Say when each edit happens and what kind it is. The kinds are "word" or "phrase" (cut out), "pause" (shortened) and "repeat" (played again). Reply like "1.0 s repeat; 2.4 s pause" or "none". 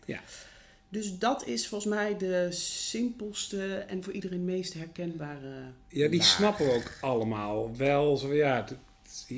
none